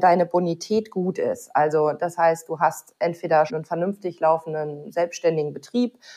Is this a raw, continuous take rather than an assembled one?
no; 1 cut; at 3.5 s

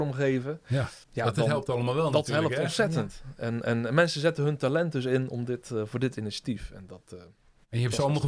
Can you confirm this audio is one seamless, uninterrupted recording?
no; 1 cut; at 1.0 s

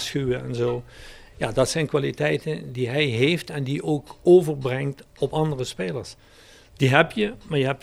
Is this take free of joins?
yes; 0 cuts

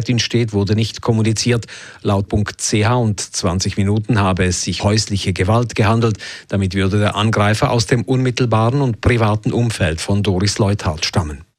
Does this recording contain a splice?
yes; 2 cuts; at 2.3 s, 4.8 s

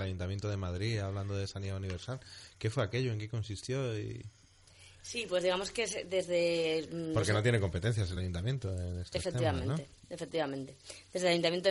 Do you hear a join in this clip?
no; 0 cuts

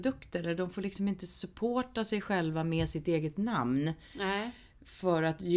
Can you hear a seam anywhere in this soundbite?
no; 0 cuts

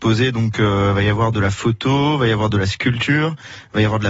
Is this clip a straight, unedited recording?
yes; 0 cuts

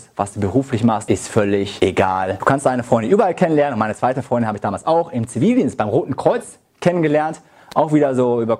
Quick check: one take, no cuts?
yes; 0 cuts

